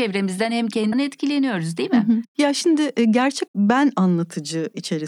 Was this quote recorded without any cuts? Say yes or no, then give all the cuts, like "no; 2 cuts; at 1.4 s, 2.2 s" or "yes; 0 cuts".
no; 2 cuts; at 0.9 s, 3.5 s